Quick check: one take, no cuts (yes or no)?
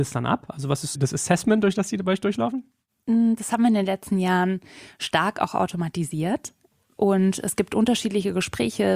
yes